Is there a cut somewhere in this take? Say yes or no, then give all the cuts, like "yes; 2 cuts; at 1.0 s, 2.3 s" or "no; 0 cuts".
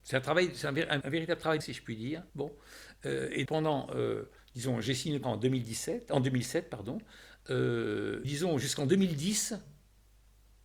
yes; 7 cuts; at 1.0 s, 1.6 s, 2.3 s, 3.5 s, 4.4 s, 5.2 s, 8.2 s